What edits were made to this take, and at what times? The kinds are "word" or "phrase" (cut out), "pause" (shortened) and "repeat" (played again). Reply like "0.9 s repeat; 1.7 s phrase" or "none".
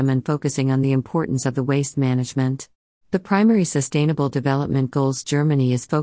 2.9 s pause

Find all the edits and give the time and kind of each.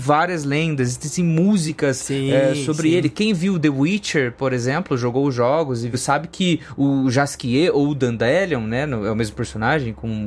none

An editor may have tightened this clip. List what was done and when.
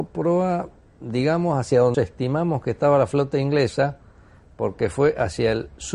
1.9 s word

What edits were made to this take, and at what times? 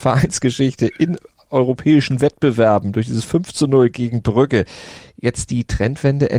none

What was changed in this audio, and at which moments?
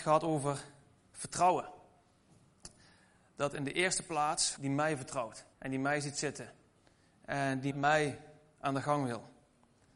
4.6 s phrase; 5.5 s pause; 7.7 s word

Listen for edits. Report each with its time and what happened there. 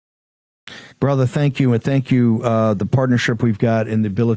0.9 s pause

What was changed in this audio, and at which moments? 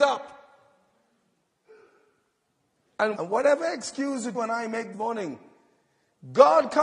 3.1 s word; 4.3 s word; 4.9 s word

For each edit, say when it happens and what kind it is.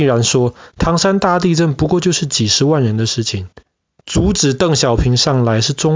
3.7 s pause

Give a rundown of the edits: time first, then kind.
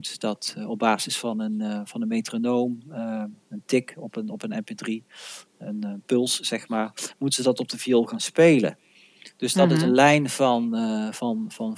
3.4 s pause

